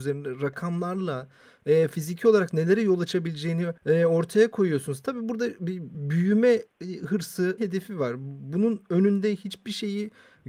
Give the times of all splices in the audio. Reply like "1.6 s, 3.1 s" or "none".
3.8 s, 5.9 s, 7.6 s